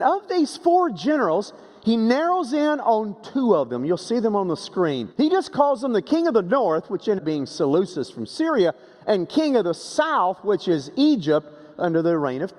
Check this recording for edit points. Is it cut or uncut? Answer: cut